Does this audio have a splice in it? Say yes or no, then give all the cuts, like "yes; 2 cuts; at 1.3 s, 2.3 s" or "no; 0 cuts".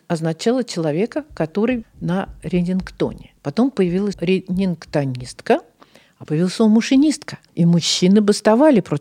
yes; 5 cuts; at 1.8 s, 3.4 s, 4.1 s, 6.3 s, 7.5 s